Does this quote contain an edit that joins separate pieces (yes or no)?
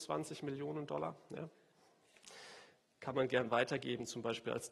no